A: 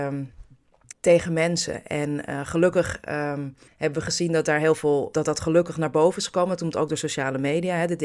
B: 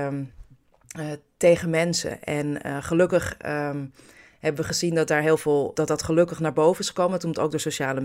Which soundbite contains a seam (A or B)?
A